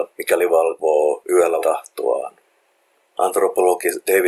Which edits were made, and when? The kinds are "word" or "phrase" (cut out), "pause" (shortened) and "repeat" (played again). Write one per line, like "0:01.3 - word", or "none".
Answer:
0:01.6 - word